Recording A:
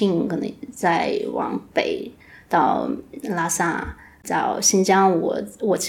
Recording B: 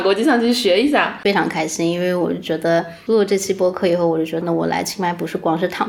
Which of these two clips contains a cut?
B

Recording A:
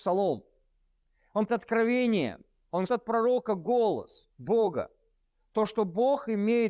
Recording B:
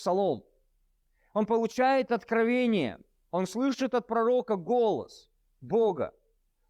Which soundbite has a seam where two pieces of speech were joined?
A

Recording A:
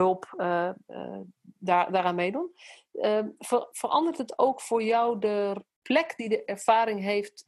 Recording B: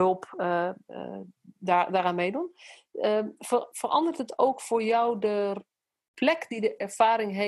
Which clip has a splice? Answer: A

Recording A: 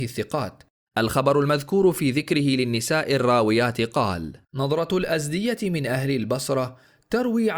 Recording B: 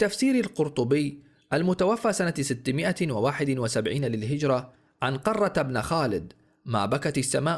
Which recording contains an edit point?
A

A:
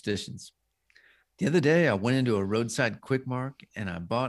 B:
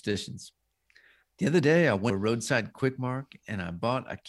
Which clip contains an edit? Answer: B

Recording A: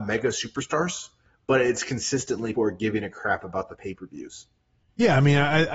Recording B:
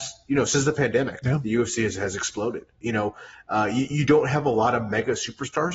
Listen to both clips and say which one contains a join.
A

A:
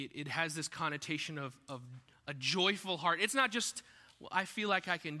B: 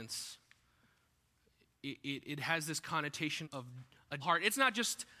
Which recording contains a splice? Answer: B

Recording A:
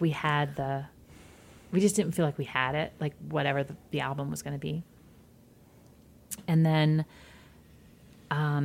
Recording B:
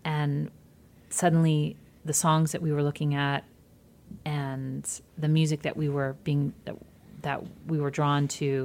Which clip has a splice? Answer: B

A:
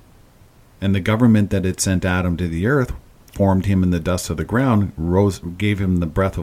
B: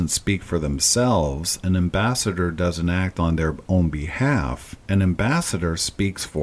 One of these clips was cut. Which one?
B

